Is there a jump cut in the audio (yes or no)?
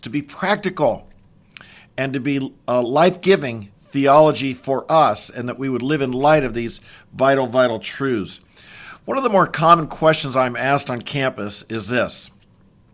no